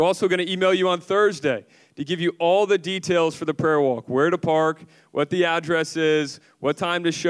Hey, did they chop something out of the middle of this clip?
no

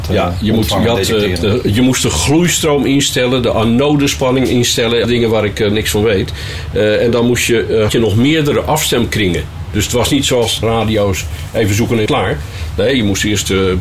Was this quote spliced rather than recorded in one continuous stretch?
yes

